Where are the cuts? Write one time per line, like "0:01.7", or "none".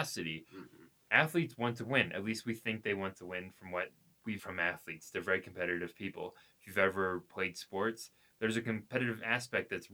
0:04.4